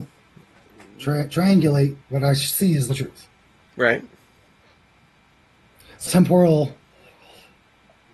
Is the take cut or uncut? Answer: cut